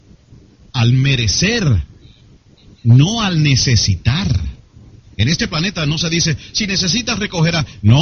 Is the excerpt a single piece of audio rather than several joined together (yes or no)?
yes